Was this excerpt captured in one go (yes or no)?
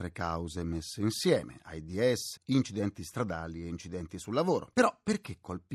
no